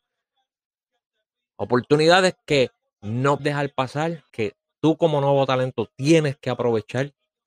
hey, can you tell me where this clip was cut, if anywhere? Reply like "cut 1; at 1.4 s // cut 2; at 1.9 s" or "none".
cut 1; at 3.4 s // cut 2; at 4.3 s